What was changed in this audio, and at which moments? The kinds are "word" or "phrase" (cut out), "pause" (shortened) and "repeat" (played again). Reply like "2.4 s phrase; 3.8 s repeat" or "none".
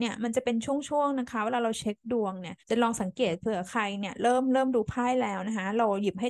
2.6 s pause

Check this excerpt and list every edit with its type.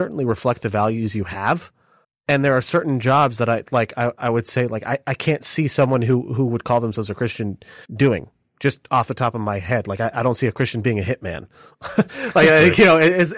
2.0 s pause; 7.9 s pause

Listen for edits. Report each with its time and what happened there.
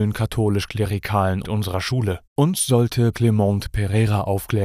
1.4 s word; 2.2 s pause; 3.1 s word

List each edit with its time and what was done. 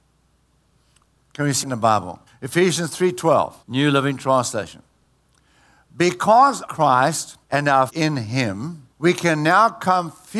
1.6 s word; 2.3 s pause; 3.6 s pause; 6.7 s word; 7.4 s pause; 7.9 s word; 8.9 s pause

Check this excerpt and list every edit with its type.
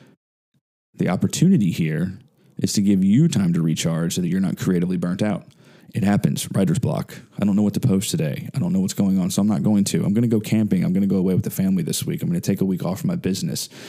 none

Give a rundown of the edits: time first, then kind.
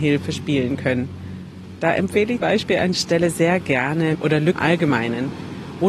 2.4 s word; 2.9 s word; 4.1 s word; 4.6 s word

